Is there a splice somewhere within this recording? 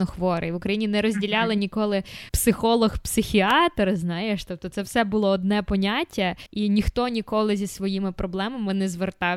yes; 2 cuts; at 2.3 s, 6.5 s

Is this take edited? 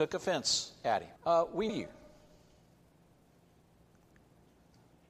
yes; 2 cuts; at 1.2 s, 1.7 s

